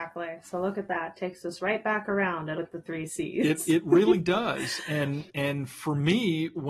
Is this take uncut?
no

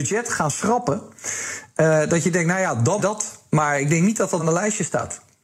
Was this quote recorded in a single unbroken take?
no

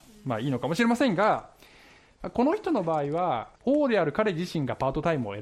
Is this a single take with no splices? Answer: no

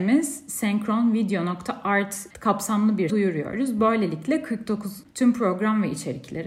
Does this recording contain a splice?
yes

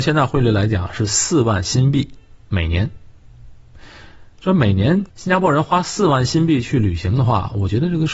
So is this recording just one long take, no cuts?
no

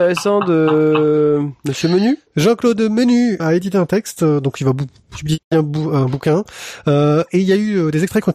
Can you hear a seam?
yes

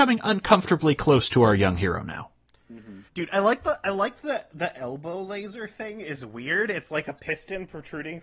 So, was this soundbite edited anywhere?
yes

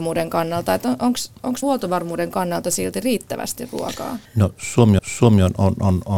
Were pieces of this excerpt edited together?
yes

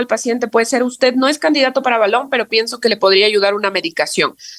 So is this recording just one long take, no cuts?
yes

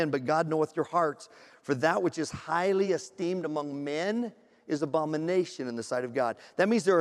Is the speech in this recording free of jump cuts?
yes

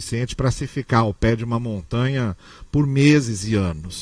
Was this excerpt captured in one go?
yes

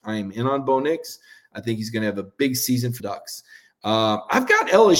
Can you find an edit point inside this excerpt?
yes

